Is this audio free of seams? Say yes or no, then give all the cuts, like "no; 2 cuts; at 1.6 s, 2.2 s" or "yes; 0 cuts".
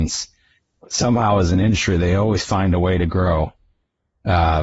yes; 0 cuts